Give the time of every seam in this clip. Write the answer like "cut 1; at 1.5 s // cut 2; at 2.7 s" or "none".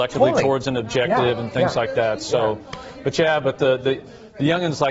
none